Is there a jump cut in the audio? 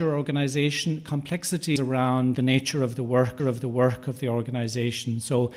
yes; 3 cuts; at 1.8 s, 2.3 s, 3.4 s

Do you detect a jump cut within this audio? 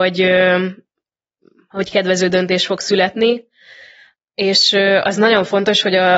no; 0 cuts

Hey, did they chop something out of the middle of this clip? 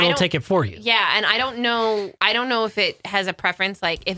yes; 1 cut; at 2.2 s

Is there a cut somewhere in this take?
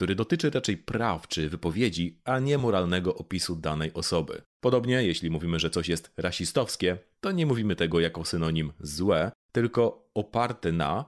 no; 0 cuts

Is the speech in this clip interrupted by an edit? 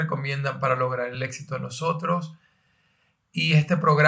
no; 0 cuts

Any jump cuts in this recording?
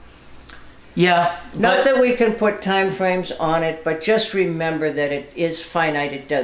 no; 0 cuts

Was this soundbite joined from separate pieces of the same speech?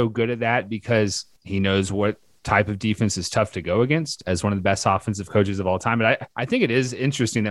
yes; 1 cut; at 6.3 s

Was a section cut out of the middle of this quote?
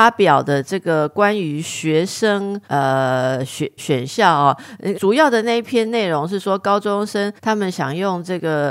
yes; 4 cuts; at 2.6 s, 3.8 s, 4.9 s, 7.4 s

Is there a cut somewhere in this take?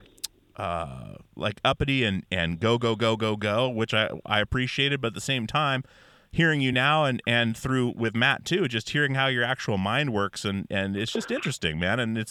no; 0 cuts

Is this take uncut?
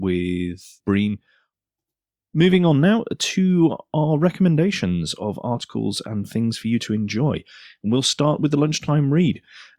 yes; 0 cuts

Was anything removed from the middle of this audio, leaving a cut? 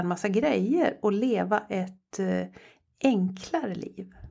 no; 0 cuts

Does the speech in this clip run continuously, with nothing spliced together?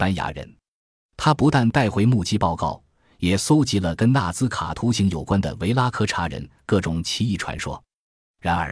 yes; 0 cuts

